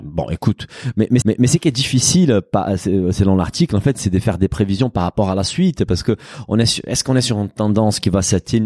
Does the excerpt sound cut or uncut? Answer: cut